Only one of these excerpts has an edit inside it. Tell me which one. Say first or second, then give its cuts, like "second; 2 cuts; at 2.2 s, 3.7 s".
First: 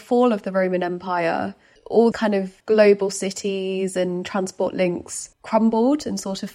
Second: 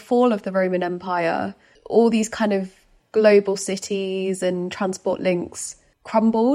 first; 3 cuts; at 2.1 s, 2.6 s, 5.3 s